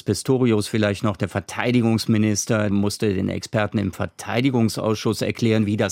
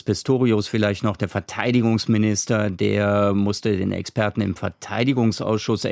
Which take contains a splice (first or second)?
first